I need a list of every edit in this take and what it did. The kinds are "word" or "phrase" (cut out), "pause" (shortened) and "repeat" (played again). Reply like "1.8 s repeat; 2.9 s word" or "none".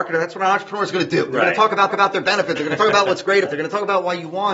1.9 s repeat; 3.4 s word